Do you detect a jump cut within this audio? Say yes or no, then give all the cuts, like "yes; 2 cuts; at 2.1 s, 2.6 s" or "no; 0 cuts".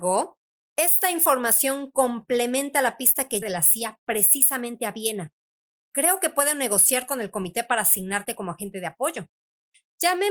yes; 1 cut; at 3.4 s